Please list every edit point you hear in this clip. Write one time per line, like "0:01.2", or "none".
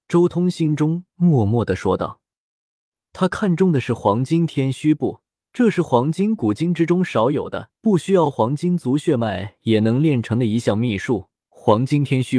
0:05.4
0:07.7
0:11.4

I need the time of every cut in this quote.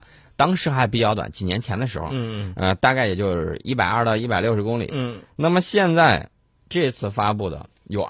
0:06.4

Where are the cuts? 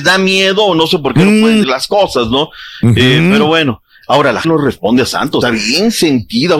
0:01.6
0:04.4
0:05.4

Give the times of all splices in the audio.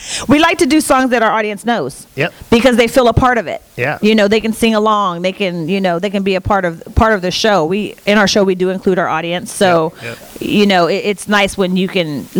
none

